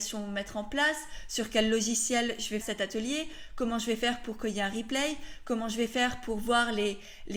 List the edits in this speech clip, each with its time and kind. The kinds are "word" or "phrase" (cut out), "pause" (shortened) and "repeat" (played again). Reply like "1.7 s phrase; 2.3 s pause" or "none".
2.6 s word